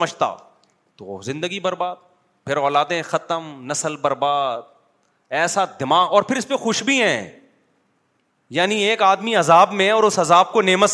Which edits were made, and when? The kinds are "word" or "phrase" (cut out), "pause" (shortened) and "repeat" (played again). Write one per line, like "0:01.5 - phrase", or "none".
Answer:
none

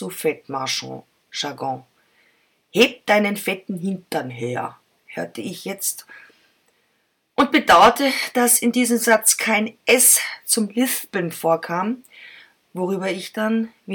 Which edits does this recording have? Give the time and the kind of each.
none

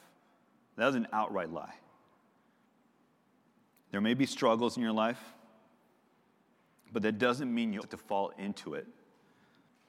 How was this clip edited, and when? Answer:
0:07.8 - word

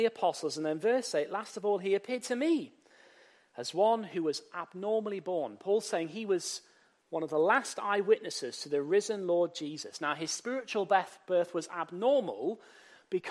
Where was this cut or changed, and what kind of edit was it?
none

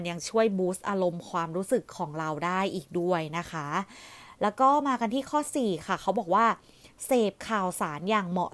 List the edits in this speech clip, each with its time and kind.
none

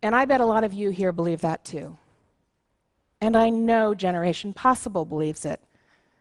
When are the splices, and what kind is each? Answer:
none

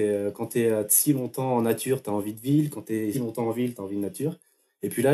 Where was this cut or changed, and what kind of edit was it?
0:03.1 - word

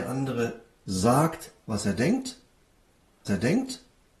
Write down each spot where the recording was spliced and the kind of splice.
0:03.3 - repeat

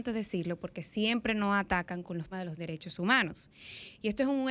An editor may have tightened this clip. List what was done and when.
0:02.3 - word

